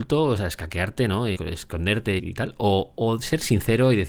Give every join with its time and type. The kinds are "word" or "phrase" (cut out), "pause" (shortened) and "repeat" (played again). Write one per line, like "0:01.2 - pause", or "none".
0:01.4 - word
0:02.2 - word